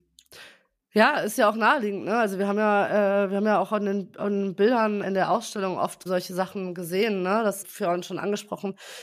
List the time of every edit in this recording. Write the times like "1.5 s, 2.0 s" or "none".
5.0 s, 6.1 s, 7.6 s